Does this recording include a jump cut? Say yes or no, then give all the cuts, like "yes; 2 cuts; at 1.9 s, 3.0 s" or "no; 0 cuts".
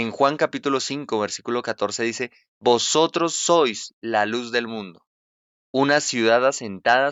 no; 0 cuts